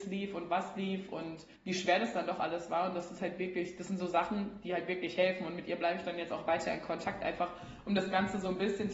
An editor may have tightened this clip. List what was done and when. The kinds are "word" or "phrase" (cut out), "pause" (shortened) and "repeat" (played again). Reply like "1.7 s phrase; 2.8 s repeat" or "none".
1.5 s pause

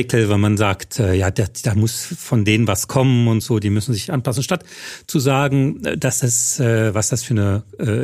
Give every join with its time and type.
none

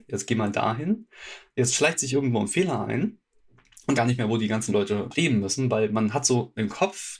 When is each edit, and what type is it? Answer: 4.0 s phrase; 5.1 s word

